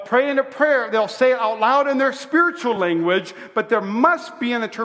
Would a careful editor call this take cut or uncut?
uncut